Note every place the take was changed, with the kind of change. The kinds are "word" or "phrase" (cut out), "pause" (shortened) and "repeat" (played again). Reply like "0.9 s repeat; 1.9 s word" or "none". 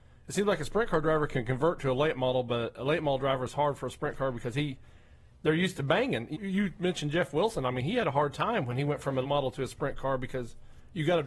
6.3 s word; 9.2 s word